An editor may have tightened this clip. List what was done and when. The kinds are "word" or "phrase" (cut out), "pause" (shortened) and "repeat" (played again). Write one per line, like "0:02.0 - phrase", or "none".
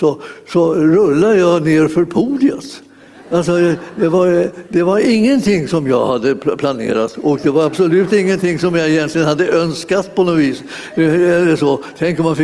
none